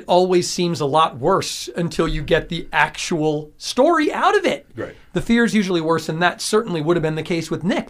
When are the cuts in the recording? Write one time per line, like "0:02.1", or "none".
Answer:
none

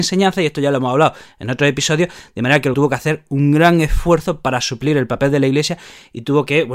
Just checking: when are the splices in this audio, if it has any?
0:02.7

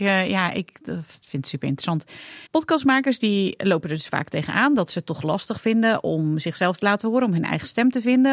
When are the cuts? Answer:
0:01.2
0:02.5

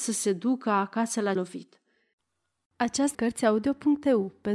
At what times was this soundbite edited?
0:01.4
0:03.1

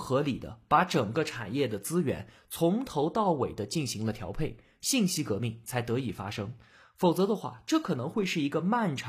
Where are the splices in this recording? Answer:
none

